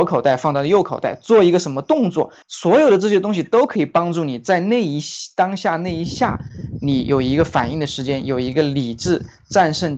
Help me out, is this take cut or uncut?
cut